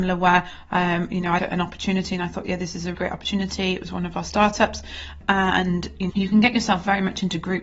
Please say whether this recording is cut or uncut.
cut